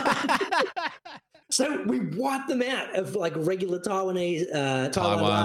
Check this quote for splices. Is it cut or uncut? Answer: cut